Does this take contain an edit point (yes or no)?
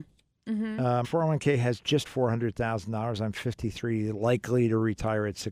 yes